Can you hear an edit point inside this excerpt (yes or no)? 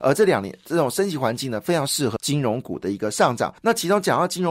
yes